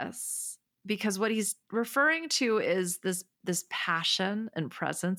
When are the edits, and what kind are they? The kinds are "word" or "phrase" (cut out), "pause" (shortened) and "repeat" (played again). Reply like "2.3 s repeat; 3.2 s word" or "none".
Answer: 1.6 s pause